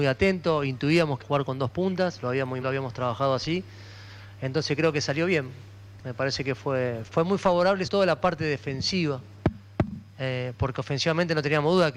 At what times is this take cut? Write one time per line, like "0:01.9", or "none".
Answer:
0:01.2
0:02.6
0:07.1
0:07.9